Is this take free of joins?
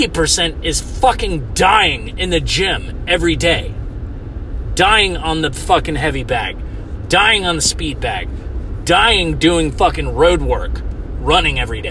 yes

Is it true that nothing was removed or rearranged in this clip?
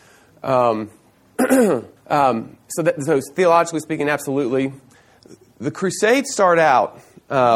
no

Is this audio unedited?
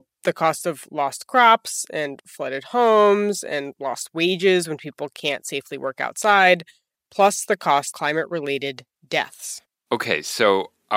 no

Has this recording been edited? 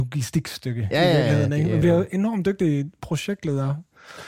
no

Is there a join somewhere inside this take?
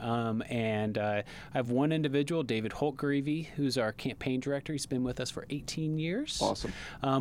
no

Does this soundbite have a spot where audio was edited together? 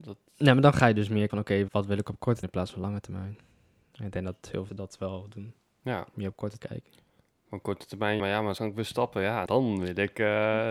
yes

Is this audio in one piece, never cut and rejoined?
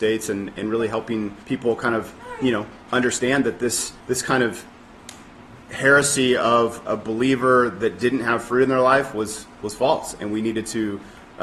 no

